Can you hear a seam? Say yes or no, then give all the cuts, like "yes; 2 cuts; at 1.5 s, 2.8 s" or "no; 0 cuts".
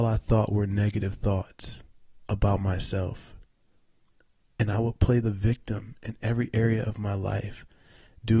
no; 0 cuts